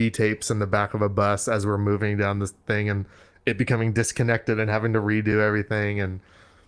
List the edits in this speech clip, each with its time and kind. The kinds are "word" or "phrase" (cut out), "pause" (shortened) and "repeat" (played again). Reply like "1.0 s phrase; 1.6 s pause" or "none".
none